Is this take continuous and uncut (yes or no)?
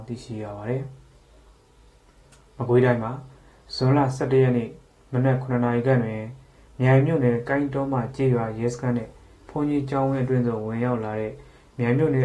yes